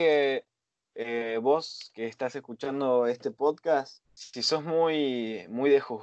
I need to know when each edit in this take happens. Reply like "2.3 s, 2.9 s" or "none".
4.0 s